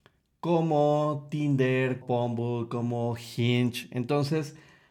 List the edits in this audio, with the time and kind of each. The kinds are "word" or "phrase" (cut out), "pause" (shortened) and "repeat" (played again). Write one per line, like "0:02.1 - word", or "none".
0:02.0 - word